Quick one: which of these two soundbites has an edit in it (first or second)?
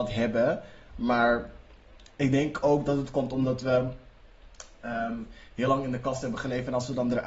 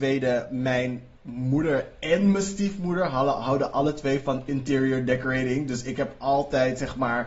second